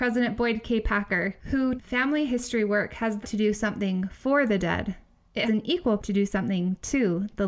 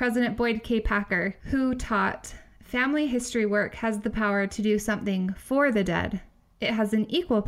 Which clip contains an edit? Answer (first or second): first